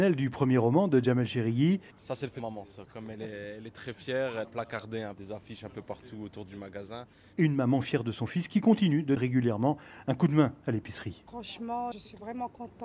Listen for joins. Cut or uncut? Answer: cut